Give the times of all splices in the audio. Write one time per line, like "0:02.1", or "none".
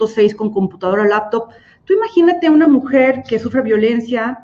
none